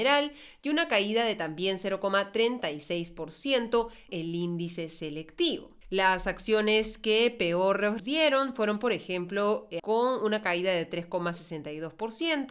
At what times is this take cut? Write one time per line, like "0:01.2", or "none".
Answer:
0:04.1
0:05.8
0:08.0
0:09.8